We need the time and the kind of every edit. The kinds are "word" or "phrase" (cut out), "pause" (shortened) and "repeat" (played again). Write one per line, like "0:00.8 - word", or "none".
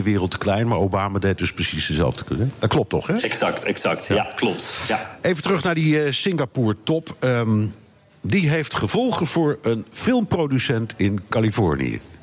none